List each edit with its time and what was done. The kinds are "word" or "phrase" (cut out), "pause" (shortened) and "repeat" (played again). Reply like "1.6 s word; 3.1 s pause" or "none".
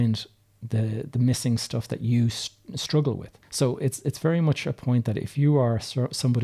3.4 s pause